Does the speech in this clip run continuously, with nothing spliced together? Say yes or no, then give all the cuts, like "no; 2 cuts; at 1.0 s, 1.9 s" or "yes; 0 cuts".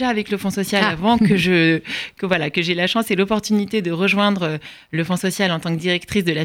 yes; 0 cuts